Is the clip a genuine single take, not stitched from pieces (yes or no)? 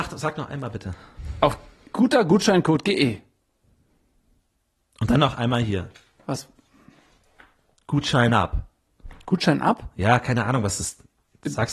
yes